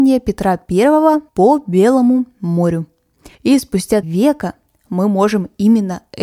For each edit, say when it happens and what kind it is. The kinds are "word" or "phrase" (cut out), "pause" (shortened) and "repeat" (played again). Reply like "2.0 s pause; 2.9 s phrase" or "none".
1.3 s pause; 3.3 s pause; 4.0 s phrase